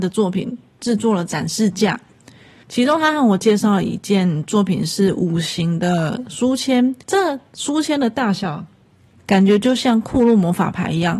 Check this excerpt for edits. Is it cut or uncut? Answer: cut